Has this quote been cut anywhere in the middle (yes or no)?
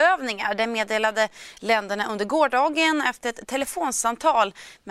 no